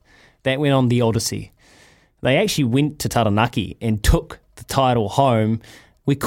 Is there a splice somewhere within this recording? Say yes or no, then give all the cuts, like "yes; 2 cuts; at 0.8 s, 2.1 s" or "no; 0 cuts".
no; 0 cuts